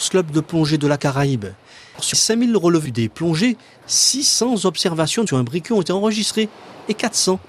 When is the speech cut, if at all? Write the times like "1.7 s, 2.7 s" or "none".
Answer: 1.0 s, 2.1 s, 2.9 s, 5.3 s